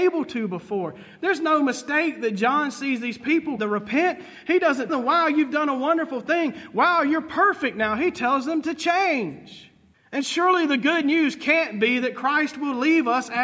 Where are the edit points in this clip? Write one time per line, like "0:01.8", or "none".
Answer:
0:03.6
0:04.9
0:09.9